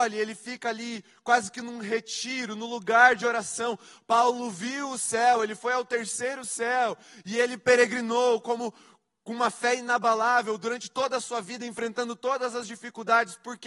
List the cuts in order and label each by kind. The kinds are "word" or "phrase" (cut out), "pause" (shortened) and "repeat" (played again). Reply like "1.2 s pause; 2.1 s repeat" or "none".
none